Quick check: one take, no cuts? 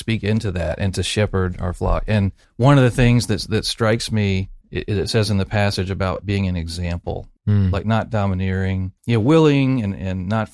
no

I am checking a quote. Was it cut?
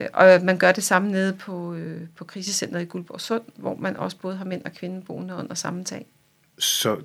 no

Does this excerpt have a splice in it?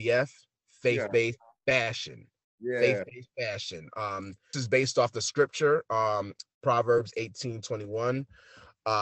yes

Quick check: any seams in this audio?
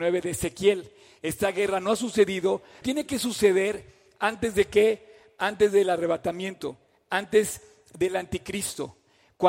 yes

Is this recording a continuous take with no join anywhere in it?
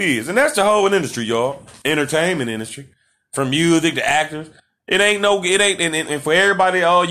yes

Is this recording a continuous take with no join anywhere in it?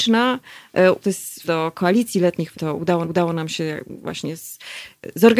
no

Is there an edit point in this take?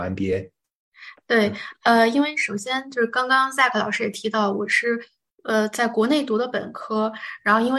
no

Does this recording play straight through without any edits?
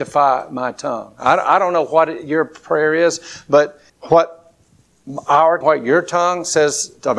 no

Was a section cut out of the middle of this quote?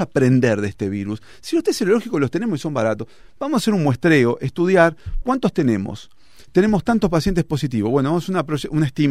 yes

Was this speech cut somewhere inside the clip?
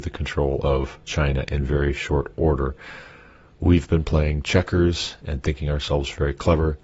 no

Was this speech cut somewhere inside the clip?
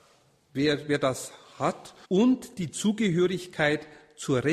yes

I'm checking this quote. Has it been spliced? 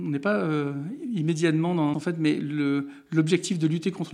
yes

